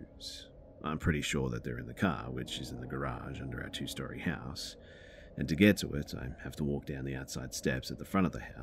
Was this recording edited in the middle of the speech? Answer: no; 0 cuts

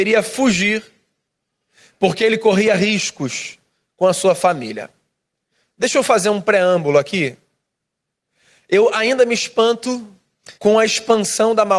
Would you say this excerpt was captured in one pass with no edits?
no; 1 cut; at 10.6 s

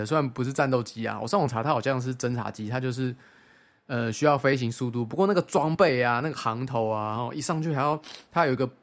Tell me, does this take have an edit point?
no; 0 cuts

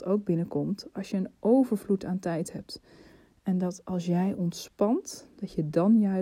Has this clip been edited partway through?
no; 0 cuts

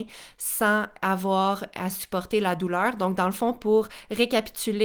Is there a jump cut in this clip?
no; 0 cuts

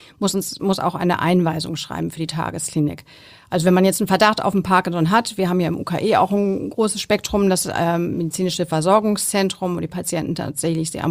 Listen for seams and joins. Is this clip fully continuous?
yes; 0 cuts

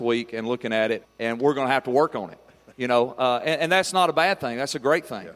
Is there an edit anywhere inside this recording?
yes; 1 cut; at 1.0 s

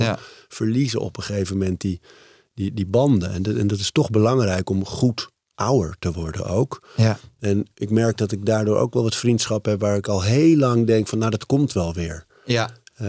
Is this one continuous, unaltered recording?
yes; 0 cuts

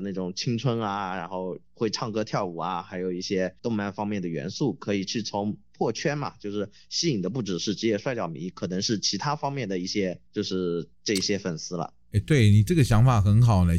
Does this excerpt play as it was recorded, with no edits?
no; 4 cuts; at 1.6 s, 3.6 s, 10.3 s, 10.9 s

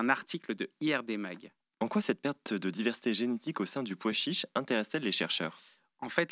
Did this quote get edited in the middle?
no; 0 cuts

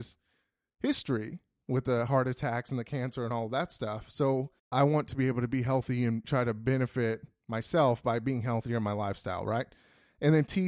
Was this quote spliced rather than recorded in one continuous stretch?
yes; 2 cuts; at 4.6 s, 6.2 s

